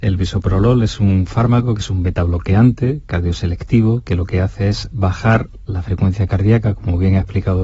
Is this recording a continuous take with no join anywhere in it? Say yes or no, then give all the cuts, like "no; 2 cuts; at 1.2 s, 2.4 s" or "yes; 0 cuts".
yes; 0 cuts